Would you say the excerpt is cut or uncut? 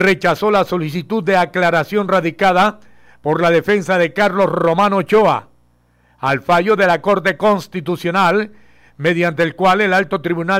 uncut